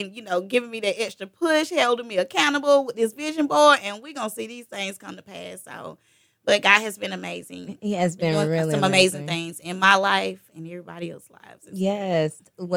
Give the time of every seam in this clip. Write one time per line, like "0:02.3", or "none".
none